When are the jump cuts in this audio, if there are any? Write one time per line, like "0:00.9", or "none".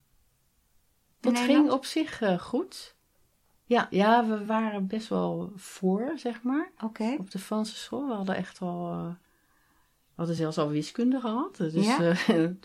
none